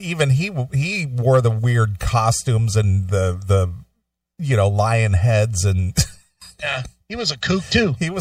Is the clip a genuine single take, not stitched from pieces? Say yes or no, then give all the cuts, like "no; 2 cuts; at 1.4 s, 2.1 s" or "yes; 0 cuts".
yes; 0 cuts